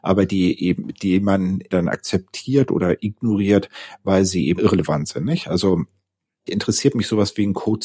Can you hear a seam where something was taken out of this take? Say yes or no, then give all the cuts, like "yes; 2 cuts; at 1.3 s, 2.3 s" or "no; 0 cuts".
yes; 3 cuts; at 1.7 s, 4.6 s, 6.5 s